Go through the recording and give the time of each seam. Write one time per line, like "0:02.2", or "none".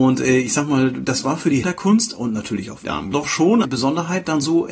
0:01.6
0:02.8
0:03.1
0:03.6